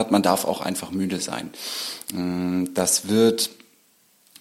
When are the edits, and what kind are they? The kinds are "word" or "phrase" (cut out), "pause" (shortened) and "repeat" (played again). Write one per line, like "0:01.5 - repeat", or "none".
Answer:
none